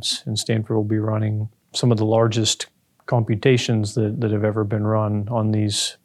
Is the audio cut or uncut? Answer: uncut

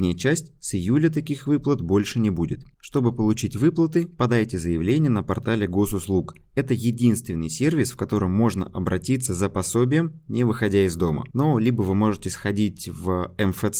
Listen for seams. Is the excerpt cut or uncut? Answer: cut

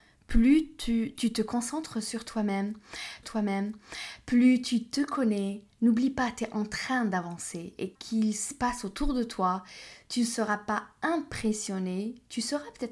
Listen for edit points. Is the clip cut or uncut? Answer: cut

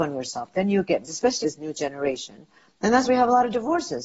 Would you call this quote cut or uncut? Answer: cut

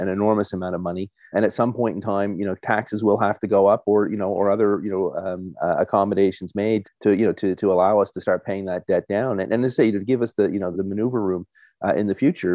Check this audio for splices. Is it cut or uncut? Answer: cut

